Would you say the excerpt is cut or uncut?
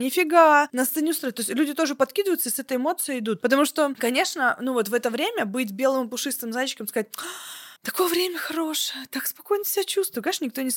cut